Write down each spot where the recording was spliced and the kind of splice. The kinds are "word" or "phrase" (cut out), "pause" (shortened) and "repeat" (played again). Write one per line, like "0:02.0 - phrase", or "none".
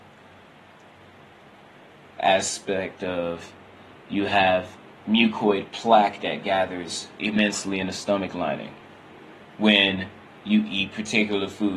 none

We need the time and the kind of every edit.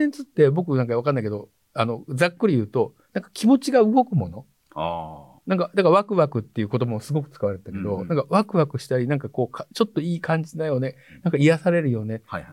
0:05.4 - pause

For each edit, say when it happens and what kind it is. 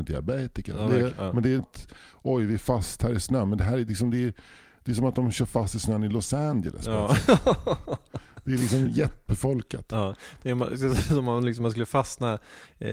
0:01.1 - word
0:01.6 - word
0:09.3 - word

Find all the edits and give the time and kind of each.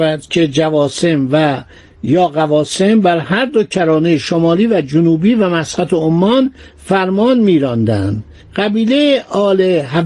none

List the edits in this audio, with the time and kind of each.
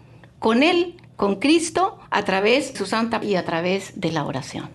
0:02.1 - pause
0:02.7 - word
0:03.2 - word

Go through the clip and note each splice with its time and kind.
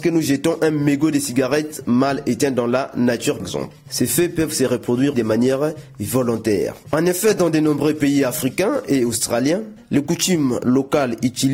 0:03.4 - word
0:05.1 - word

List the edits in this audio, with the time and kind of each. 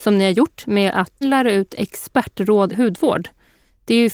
0:01.2 - word
0:02.7 - word

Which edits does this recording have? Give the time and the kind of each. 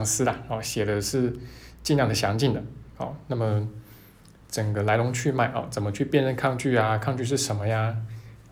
none

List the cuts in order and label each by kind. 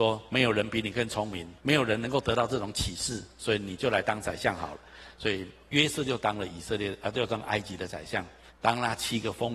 0:01.6 - pause
0:08.5 - pause

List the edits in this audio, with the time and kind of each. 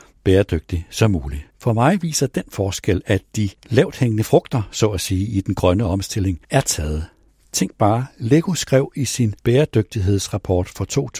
0:01.5 - pause
0:03.6 - pause
0:06.4 - pause
0:07.3 - pause
0:09.4 - pause

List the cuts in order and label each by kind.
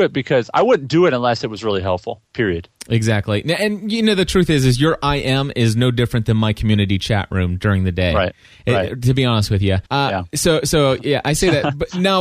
0:02.2 - pause
0:09.9 - pause

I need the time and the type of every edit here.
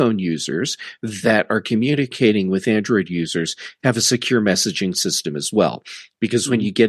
none

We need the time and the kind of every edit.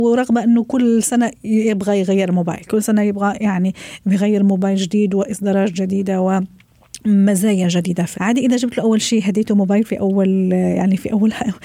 0:08.1 - word

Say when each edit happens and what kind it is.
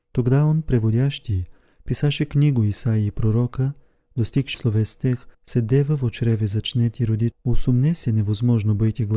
0:04.5 - word
0:05.3 - pause
0:07.3 - word

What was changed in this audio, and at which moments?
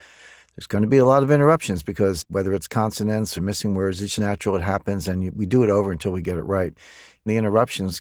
0:03.3 - phrase
0:04.2 - word

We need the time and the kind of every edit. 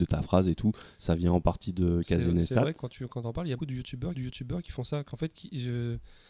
0:02.8 - word
0:03.6 - word
0:04.1 - repeat

